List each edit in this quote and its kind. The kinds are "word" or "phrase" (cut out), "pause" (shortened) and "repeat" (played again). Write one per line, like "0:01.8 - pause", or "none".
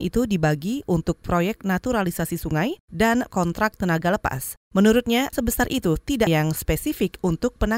0:03.3 - word
0:05.3 - word
0:06.3 - word

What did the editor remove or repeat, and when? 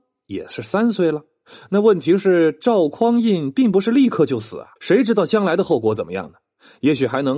0:04.8 - pause

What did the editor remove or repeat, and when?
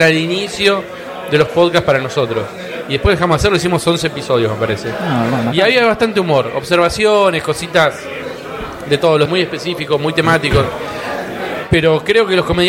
0:09.3 - phrase

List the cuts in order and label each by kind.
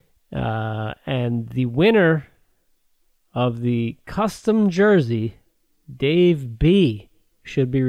none

